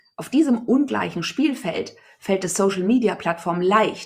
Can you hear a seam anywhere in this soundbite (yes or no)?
no